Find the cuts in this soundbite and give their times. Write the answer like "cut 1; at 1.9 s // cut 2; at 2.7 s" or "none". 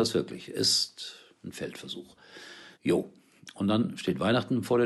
cut 1; at 2.7 s